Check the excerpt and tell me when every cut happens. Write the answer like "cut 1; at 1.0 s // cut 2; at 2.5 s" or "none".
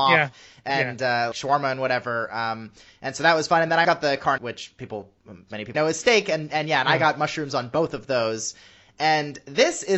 cut 1; at 1.3 s // cut 2; at 3.8 s // cut 3; at 4.4 s // cut 4; at 5.7 s